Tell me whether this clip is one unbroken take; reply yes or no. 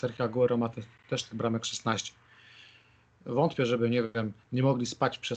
yes